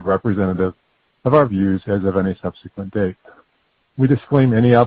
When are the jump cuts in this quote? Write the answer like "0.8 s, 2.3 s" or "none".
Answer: none